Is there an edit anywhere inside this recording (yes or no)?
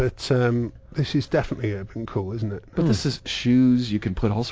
no